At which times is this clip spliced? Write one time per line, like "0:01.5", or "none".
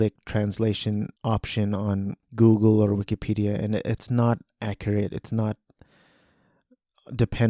0:01.2
0:02.2